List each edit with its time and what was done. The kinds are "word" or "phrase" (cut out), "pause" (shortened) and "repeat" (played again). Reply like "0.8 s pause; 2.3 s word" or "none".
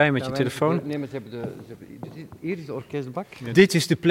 none